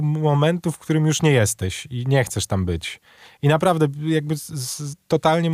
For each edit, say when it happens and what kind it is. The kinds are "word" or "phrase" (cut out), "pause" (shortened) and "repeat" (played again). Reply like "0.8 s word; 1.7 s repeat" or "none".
none

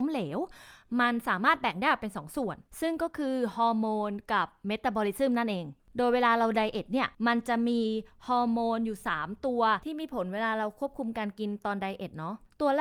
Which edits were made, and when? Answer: 7.1 s pause

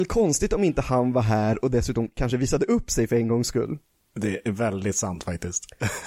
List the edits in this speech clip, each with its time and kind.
none

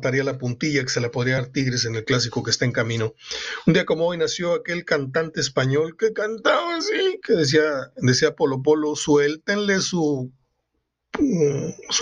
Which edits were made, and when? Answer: none

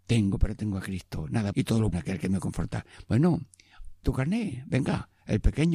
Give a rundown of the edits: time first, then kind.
1.5 s word; 1.9 s word; 4.0 s word

